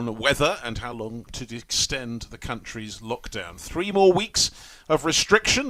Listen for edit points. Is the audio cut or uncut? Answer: uncut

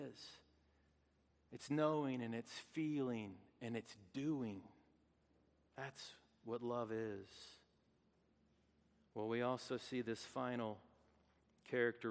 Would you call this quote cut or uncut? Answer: uncut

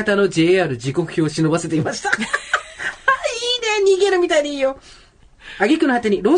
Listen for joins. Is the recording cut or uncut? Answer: uncut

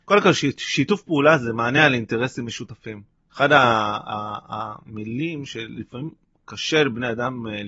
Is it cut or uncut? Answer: uncut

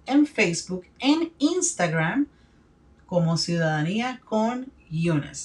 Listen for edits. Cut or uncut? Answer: uncut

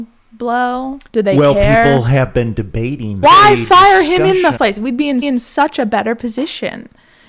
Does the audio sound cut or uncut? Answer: cut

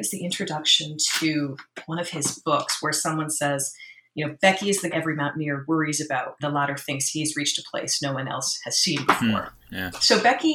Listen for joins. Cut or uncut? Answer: cut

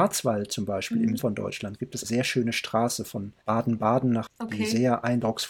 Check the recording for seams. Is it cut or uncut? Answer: cut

